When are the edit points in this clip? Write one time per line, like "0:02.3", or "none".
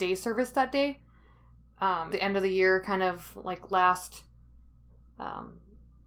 0:02.1